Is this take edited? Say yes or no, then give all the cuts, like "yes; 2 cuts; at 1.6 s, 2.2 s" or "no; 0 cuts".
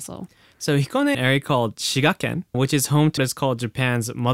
yes; 3 cuts; at 1.1 s, 2.5 s, 3.2 s